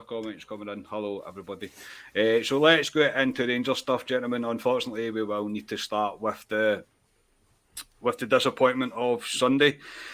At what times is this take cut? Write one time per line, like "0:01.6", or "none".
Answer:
none